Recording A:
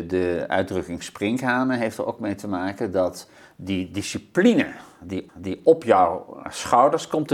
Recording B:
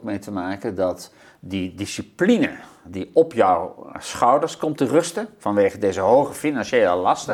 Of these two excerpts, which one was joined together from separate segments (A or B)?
A